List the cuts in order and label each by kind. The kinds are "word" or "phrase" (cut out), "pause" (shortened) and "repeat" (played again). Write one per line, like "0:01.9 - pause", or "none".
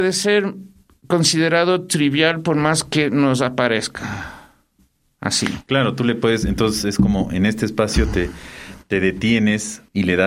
none